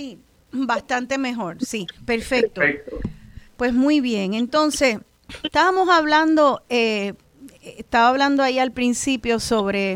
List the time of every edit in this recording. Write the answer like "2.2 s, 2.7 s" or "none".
2.0 s, 3.5 s